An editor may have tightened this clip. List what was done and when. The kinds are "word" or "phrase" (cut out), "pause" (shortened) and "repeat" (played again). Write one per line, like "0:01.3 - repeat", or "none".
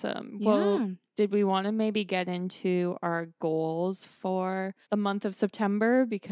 0:04.8 - pause